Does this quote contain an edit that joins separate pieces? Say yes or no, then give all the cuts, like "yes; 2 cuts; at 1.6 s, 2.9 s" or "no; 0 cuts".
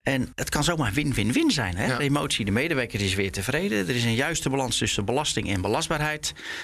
no; 0 cuts